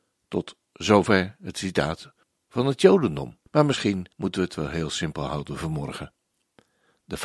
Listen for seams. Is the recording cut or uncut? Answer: cut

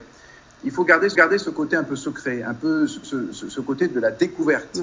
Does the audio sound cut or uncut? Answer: cut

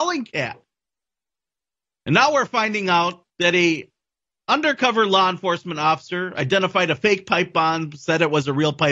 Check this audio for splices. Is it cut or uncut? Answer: cut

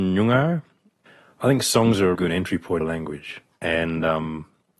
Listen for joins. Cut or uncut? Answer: cut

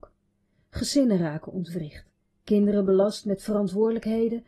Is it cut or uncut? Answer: uncut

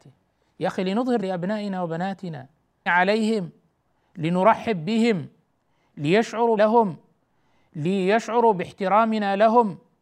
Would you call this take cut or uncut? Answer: cut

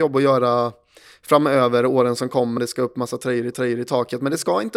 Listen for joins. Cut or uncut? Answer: cut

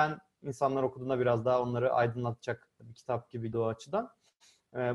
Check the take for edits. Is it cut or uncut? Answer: cut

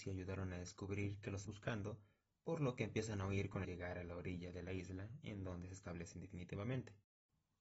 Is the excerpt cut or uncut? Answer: cut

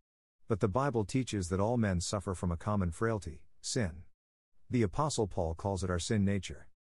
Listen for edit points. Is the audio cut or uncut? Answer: uncut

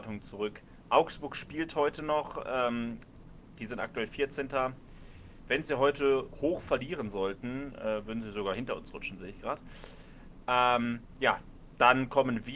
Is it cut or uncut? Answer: uncut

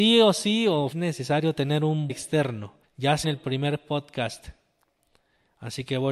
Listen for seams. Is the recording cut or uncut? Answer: cut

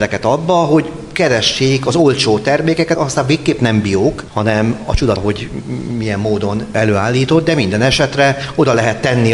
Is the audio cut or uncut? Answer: cut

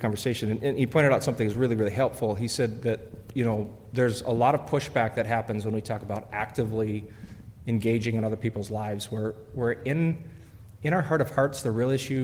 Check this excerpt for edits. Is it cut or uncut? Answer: uncut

